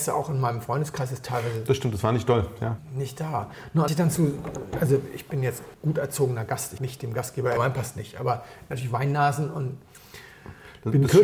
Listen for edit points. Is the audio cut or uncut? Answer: cut